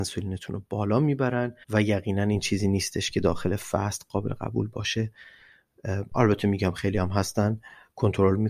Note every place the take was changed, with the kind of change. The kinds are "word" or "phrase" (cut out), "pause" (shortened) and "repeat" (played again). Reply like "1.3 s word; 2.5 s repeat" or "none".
1.6 s pause